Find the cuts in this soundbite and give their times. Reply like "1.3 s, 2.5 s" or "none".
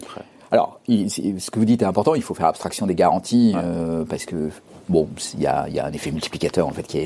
none